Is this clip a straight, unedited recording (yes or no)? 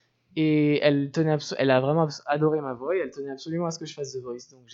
yes